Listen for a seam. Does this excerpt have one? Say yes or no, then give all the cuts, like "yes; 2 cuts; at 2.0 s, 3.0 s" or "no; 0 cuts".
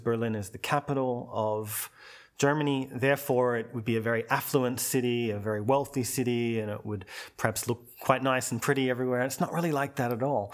no; 0 cuts